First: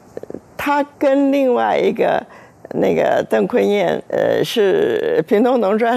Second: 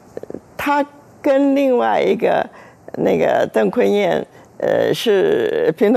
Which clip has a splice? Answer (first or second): first